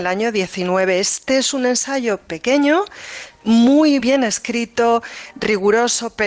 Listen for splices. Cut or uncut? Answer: cut